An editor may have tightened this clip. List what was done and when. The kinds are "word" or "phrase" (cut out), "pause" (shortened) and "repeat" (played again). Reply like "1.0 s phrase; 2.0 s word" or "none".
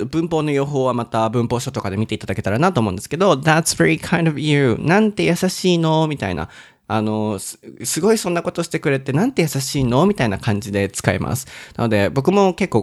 none